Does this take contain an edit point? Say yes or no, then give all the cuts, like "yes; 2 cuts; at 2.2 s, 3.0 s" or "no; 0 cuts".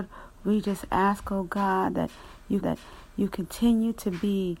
yes; 1 cut; at 2.6 s